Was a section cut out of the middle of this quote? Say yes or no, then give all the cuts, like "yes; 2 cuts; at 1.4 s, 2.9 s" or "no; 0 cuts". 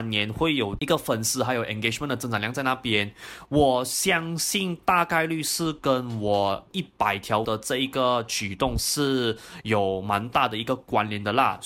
yes; 2 cuts; at 6.7 s, 7.4 s